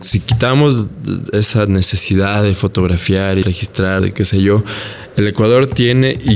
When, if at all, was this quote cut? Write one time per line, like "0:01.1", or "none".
0:03.4
0:04.0